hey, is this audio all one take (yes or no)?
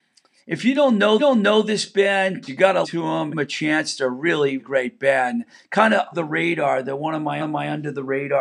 no